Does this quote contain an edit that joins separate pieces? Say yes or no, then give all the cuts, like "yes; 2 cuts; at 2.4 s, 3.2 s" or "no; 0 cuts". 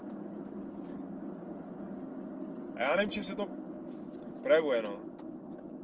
no; 0 cuts